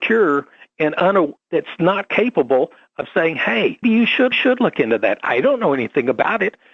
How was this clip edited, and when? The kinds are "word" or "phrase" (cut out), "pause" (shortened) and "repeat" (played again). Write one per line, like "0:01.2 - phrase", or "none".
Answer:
0:01.4 - word
0:03.8 - word
0:04.3 - repeat